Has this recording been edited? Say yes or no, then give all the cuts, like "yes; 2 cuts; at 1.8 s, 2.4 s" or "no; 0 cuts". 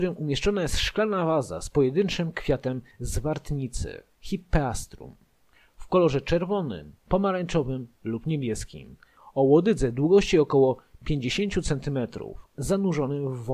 yes; 2 cuts; at 4.1 s, 7.0 s